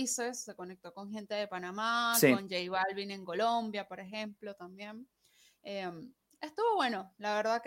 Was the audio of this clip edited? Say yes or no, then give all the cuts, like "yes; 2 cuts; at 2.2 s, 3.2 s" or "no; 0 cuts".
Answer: no; 0 cuts